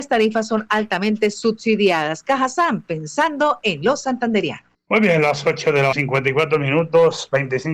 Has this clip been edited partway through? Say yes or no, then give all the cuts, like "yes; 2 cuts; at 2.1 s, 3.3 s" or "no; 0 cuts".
yes; 1 cut; at 5.9 s